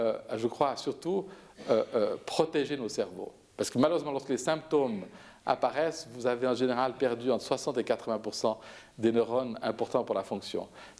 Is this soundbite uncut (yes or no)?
yes